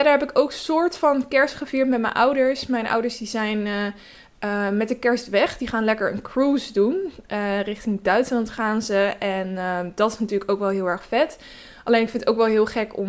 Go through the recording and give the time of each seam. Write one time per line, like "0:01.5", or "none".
none